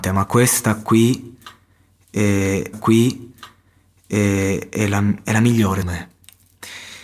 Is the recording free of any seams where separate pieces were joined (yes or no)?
no